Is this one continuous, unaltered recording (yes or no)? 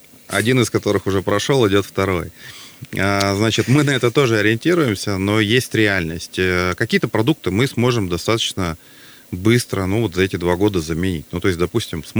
yes